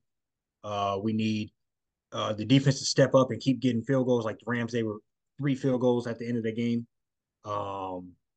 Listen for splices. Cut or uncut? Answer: uncut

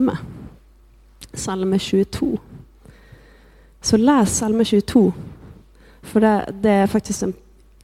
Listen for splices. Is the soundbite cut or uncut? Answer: uncut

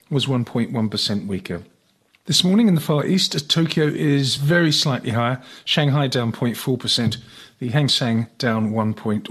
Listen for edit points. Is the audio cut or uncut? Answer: uncut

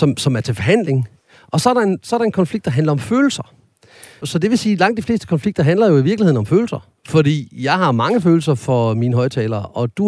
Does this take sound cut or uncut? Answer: uncut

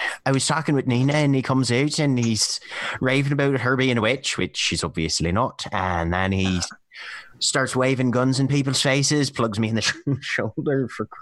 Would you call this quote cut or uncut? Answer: uncut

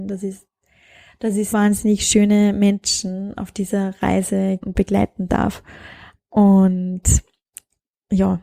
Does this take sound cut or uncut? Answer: cut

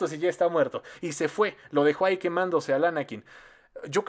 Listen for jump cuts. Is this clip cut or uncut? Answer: uncut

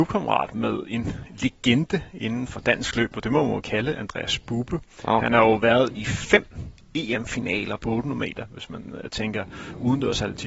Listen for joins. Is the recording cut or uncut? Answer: cut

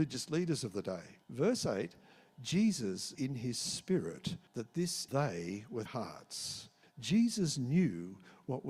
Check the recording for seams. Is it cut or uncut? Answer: cut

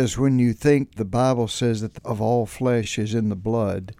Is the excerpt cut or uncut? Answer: cut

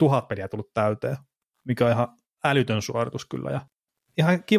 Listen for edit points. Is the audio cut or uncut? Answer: uncut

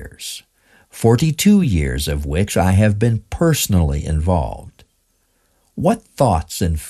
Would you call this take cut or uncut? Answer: uncut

